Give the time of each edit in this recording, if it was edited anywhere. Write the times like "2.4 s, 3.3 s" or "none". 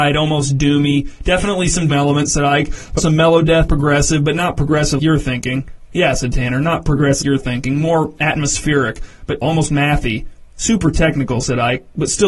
1.9 s, 3.0 s, 3.7 s, 5.0 s, 7.2 s, 9.4 s